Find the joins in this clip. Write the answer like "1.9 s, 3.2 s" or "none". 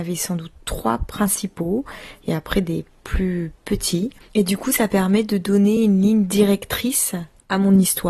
none